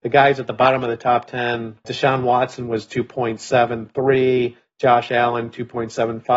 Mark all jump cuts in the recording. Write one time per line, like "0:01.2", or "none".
0:01.8